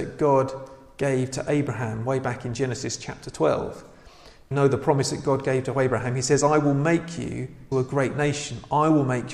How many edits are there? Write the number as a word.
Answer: two